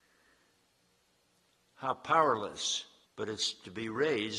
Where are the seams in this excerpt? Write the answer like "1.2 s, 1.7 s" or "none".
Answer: 3.1 s